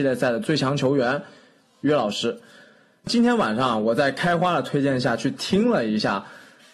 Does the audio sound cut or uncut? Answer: uncut